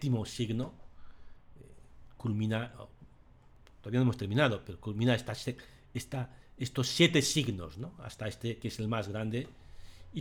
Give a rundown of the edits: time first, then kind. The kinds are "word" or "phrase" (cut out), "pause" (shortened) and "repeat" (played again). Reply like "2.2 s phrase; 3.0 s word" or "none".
none